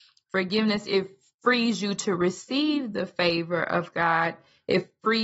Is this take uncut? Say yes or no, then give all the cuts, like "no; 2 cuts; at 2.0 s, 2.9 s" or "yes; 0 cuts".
yes; 0 cuts